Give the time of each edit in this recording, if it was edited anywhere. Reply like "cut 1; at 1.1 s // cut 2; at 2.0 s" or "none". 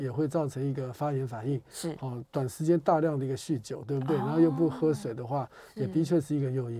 cut 1; at 2.3 s